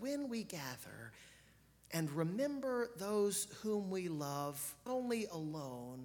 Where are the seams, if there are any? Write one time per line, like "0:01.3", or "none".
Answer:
0:04.9